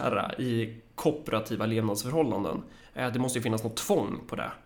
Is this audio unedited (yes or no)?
yes